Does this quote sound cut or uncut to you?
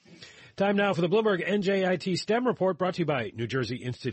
uncut